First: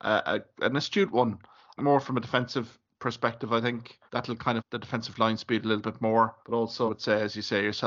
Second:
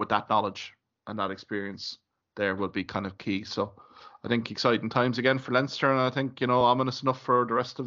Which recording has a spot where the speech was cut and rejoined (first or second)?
first